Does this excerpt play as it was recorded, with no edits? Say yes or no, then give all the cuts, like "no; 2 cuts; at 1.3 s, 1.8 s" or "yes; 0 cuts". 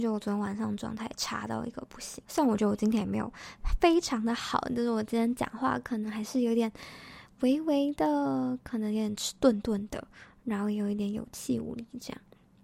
no; 1 cut; at 2.3 s